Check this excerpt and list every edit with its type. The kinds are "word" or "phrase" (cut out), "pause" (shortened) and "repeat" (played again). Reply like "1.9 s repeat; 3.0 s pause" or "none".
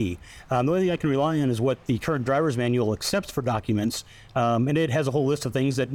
none

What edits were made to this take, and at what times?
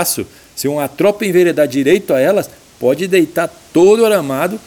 none

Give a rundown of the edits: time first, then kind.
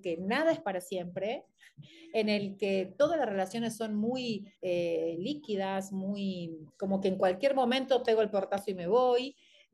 4.6 s pause; 6.7 s pause

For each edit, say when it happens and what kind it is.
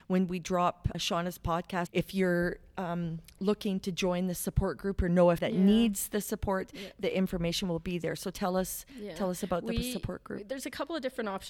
0.9 s word; 1.9 s word; 5.4 s word

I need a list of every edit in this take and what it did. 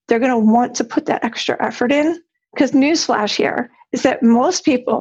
none

